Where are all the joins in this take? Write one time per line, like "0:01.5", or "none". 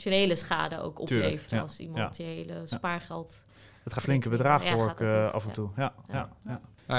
0:04.0

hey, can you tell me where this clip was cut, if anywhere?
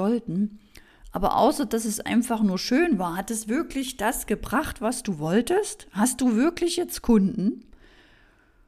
none

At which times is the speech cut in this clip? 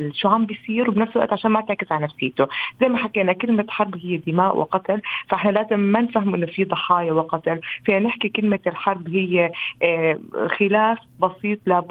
none

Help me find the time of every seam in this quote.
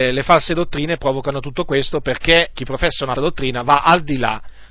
0:01.0
0:02.5
0:03.2

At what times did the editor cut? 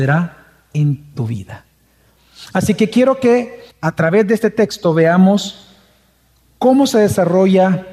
0:03.7

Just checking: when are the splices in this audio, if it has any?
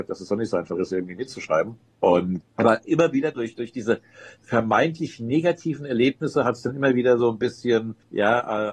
none

